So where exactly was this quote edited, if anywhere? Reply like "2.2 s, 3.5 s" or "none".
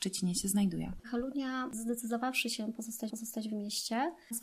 3.1 s